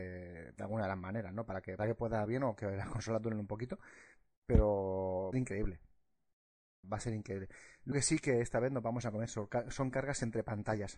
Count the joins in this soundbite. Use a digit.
5